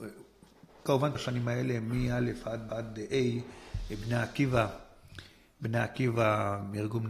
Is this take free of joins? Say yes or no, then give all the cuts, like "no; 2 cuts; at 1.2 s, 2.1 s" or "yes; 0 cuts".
no; 2 cuts; at 1.1 s, 2.7 s